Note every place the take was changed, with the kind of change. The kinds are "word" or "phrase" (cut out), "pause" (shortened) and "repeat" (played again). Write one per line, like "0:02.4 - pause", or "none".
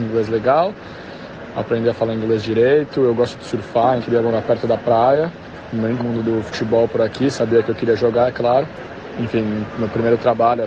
0:04.0 - word
0:06.0 - word